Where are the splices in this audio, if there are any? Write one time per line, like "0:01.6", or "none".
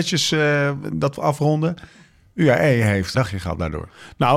0:01.2
0:03.1